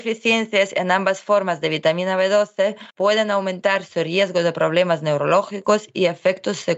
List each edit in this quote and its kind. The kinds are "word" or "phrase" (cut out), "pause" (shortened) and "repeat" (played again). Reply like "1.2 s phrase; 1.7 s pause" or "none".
2.9 s pause